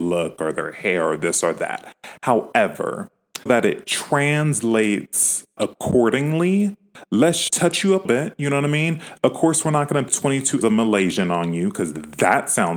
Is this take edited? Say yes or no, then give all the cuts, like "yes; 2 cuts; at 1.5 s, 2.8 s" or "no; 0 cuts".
yes; 6 cuts; at 3.5 s, 5.6 s, 7.5 s, 8.0 s, 10.1 s, 10.6 s